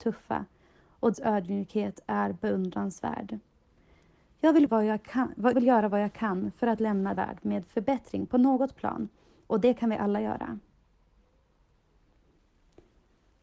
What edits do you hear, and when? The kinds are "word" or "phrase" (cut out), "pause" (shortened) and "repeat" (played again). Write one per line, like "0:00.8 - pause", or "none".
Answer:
0:01.1 - word
0:04.7 - word
0:05.5 - word
0:07.2 - word

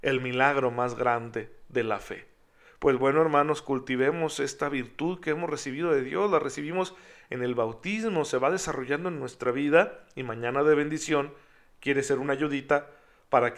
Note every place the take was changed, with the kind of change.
none

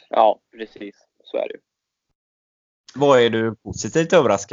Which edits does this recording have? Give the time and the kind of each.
none

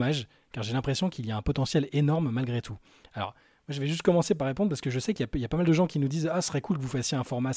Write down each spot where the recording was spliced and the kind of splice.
none

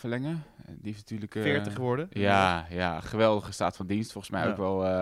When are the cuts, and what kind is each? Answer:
none

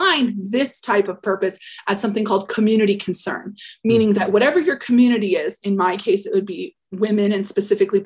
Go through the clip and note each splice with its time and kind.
none

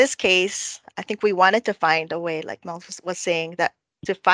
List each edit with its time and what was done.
none

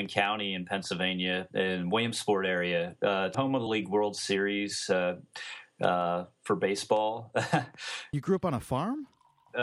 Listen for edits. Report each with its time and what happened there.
0:01.5 - word
0:03.3 - word
0:03.7 - word
0:08.1 - word

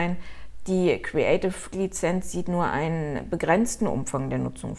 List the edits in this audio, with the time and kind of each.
0:01.7 - word

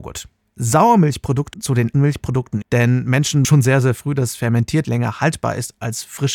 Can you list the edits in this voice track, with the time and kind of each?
0:01.5 - word
0:01.9 - word
0:02.6 - word
0:03.4 - word
0:04.8 - word

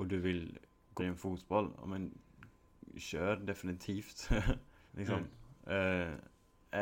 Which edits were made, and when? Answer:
0:01.0 - word
0:04.9 - pause

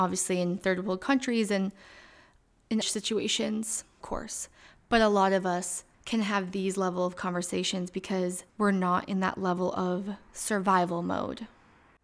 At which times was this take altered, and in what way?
0:02.8 - word
0:04.0 - phrase
0:05.9 - pause
0:08.5 - pause

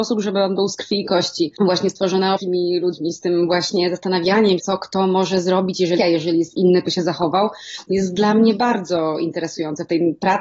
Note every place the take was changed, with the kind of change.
0:01.6 - pause
0:02.4 - phrase
0:04.6 - word
0:06.0 - phrase
0:06.9 - word

